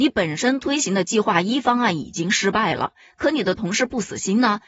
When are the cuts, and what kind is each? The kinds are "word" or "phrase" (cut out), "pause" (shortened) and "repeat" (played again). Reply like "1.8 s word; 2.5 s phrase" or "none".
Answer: none